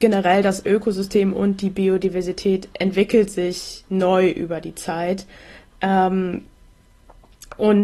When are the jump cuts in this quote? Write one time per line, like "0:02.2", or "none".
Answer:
none